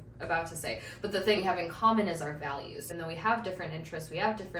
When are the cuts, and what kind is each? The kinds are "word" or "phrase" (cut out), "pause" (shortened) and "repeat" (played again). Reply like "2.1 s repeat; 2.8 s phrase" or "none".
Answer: 1.4 s word; 2.9 s word